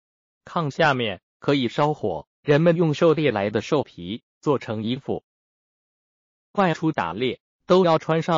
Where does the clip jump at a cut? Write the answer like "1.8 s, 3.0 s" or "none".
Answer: 2.3 s